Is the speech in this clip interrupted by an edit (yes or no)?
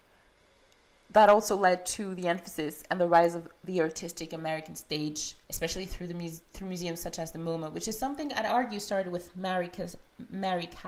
yes